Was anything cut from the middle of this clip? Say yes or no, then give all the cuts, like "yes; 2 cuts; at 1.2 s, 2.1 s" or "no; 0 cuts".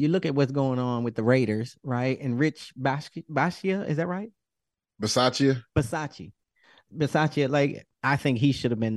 no; 0 cuts